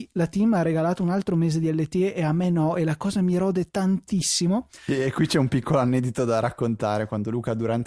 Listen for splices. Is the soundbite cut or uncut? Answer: uncut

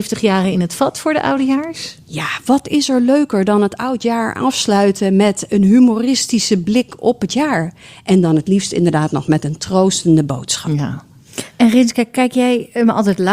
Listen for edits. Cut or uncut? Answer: uncut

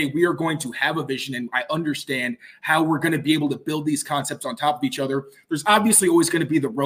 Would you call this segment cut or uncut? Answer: uncut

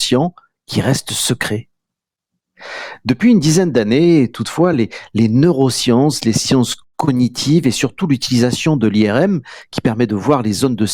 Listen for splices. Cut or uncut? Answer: uncut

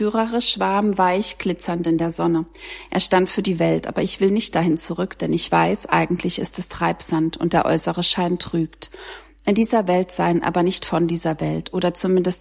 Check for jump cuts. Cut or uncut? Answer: uncut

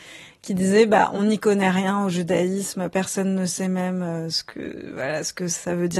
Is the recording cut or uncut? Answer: uncut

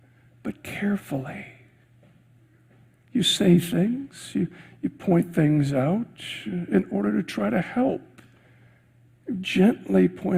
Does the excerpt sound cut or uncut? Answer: uncut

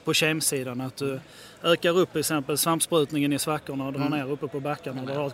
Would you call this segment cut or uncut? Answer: uncut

